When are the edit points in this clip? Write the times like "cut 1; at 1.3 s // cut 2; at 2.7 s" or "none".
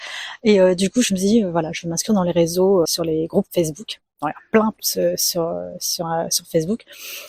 cut 1; at 2.8 s // cut 2; at 4.8 s